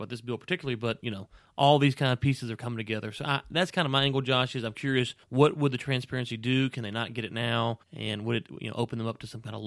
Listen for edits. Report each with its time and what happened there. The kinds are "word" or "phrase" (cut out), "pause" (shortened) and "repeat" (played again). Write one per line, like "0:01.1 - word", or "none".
0:05.2 - pause
0:07.8 - pause